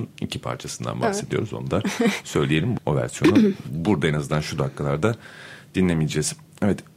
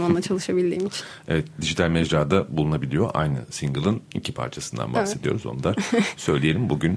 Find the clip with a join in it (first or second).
first